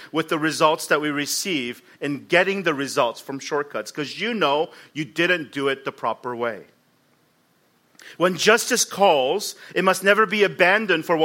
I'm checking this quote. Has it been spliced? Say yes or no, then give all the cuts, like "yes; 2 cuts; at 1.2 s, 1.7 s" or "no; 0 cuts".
no; 0 cuts